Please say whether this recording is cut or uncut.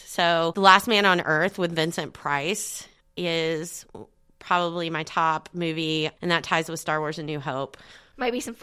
uncut